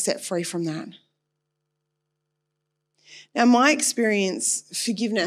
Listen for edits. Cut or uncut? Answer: uncut